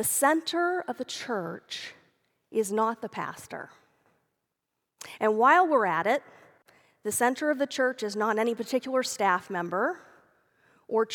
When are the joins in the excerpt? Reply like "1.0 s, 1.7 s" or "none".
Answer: none